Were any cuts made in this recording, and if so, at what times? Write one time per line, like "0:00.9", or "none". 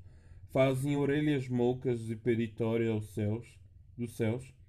none